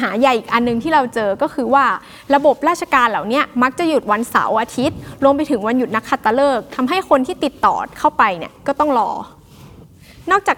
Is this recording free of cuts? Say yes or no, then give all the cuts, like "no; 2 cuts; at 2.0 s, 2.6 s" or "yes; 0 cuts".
yes; 0 cuts